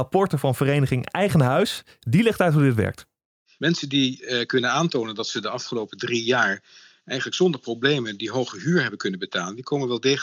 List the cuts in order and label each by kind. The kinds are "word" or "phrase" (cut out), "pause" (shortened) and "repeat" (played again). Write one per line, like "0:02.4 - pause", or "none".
none